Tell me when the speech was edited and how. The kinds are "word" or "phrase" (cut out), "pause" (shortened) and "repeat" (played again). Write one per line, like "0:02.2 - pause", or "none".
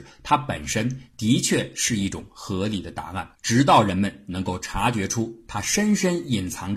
0:03.3 - pause